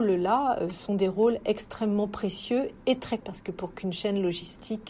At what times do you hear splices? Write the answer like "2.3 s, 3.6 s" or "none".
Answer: 3.2 s

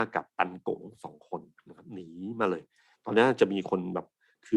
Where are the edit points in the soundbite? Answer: none

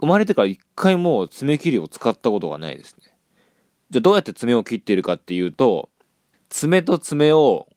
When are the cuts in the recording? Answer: 3.3 s, 6.3 s

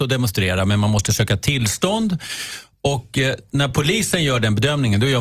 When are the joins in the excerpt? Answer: none

